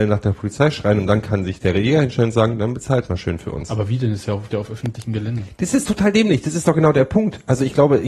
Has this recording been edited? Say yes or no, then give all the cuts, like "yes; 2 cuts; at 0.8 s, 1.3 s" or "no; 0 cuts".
yes; 1 cut; at 4.5 s